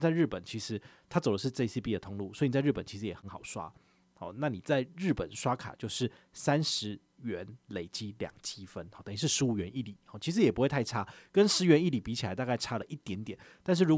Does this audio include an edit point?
no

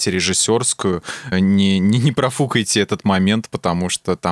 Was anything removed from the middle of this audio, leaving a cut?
yes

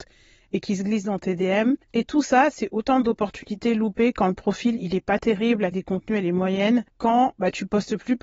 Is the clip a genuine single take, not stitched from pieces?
no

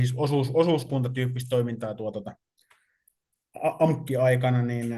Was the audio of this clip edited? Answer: no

